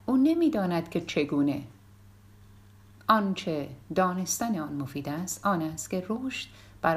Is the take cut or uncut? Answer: uncut